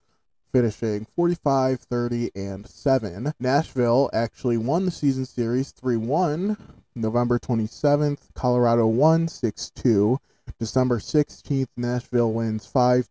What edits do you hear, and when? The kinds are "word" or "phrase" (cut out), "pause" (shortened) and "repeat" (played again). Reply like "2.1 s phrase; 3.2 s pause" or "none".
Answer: 3.4 s pause

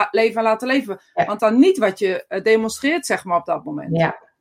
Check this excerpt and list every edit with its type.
1.4 s phrase

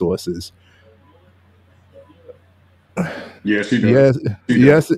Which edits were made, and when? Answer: 3.4 s pause

